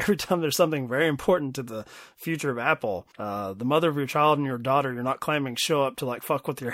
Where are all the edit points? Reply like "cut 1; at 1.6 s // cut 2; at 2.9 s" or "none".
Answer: cut 1; at 3.1 s